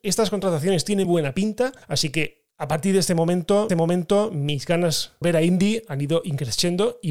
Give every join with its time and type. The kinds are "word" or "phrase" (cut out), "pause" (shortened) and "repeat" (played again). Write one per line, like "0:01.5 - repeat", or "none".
0:01.0 - word
0:01.8 - pause
0:03.7 - repeat
0:05.2 - word